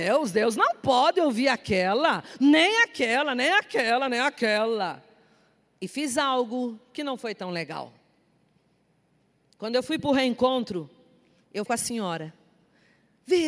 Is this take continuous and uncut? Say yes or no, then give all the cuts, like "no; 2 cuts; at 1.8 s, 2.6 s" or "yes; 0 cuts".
no; 1 cut; at 11.7 s